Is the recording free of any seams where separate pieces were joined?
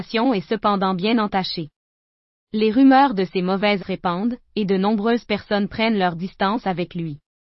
no; 1 cut; at 3.8 s

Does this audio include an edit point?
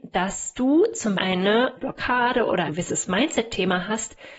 yes; 3 cuts; at 1.1 s, 1.8 s, 2.7 s

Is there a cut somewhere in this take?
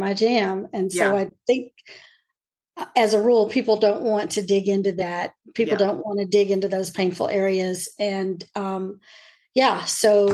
no; 0 cuts

